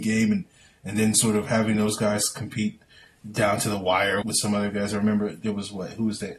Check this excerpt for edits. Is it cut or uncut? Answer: cut